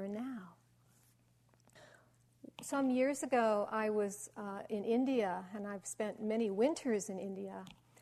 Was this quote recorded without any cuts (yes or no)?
no